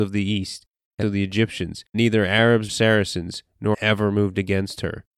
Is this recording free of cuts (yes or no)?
no